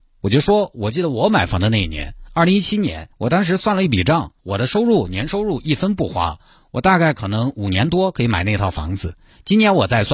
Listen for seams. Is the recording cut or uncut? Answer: cut